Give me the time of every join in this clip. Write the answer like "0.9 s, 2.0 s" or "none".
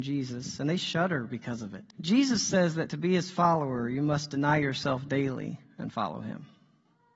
1.9 s